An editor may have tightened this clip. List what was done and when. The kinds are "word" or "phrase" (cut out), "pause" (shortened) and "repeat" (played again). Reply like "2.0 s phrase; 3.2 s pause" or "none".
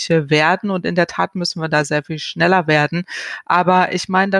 none